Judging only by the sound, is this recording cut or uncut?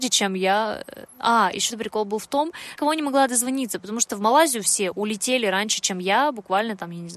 cut